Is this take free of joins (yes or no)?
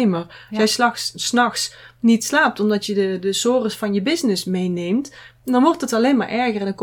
yes